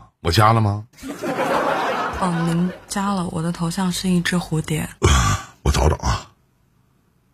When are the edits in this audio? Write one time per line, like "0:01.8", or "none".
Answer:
0:00.9
0:05.0